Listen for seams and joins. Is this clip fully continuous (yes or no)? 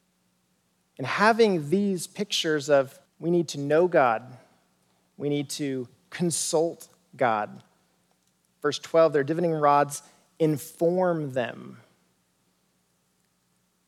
no